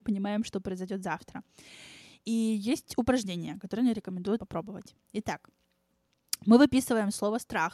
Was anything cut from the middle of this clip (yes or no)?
yes